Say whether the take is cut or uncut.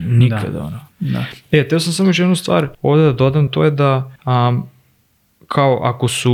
cut